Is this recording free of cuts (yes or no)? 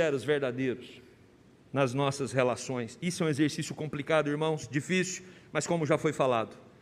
yes